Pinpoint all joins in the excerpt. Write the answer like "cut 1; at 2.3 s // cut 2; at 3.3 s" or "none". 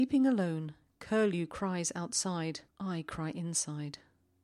cut 1; at 2.7 s